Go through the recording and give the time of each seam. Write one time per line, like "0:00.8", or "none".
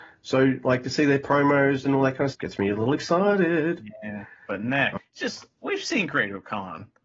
0:02.3
0:05.0